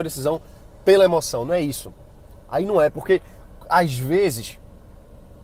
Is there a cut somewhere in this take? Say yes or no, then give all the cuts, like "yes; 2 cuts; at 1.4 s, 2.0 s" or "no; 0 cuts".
no; 0 cuts